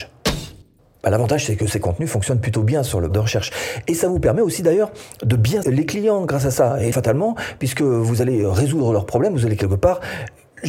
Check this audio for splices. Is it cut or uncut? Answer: cut